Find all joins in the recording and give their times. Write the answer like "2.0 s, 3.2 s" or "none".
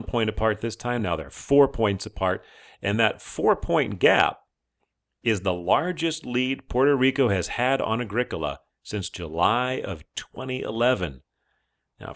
none

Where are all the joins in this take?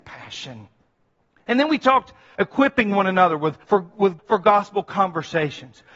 2.4 s, 3.6 s, 4.2 s

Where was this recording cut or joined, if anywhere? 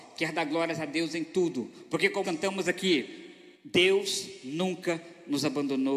2.2 s, 3.5 s

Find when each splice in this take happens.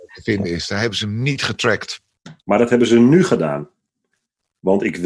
2.4 s

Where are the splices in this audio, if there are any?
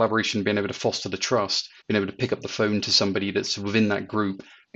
1.8 s

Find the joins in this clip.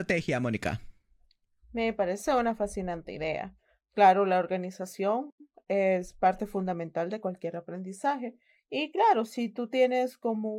none

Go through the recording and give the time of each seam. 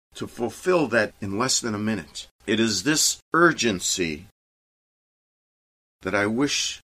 1.1 s, 2.4 s, 3.2 s

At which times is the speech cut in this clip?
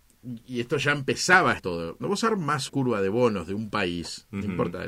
1.6 s, 2.0 s, 2.7 s

